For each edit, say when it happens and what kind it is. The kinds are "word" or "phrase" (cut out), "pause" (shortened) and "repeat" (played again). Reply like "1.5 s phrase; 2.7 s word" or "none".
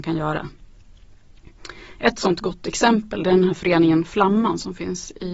none